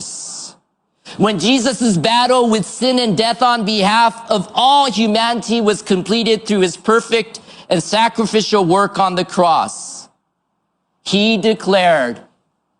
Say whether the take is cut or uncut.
uncut